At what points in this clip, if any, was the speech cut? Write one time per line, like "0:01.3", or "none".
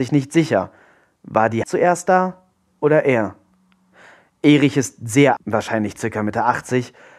0:01.6
0:05.4